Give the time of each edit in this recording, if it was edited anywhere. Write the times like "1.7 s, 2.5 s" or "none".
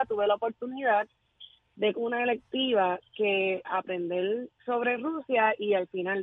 1.9 s, 3.6 s